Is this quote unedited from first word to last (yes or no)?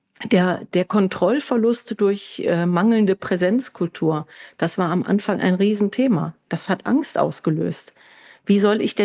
yes